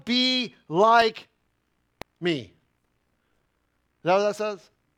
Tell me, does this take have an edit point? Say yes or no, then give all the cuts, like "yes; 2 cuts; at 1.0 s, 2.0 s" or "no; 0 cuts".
no; 0 cuts